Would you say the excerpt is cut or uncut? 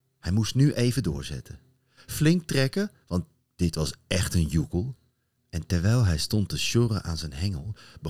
uncut